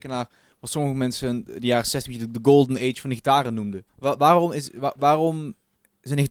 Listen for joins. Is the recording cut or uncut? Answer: cut